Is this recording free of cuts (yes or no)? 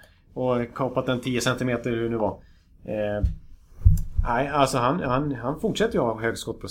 yes